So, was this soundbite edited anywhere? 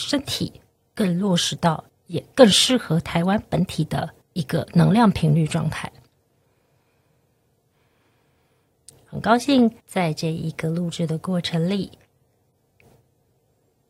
yes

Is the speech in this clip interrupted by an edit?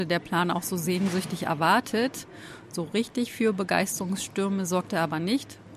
no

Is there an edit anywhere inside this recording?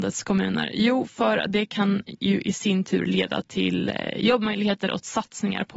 no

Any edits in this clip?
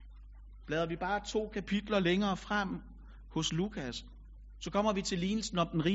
no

